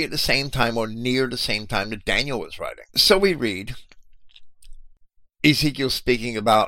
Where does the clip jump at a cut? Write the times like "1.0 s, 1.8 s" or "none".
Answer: 2.9 s